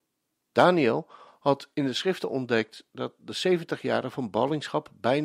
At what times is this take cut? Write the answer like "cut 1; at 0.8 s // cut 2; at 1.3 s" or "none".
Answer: none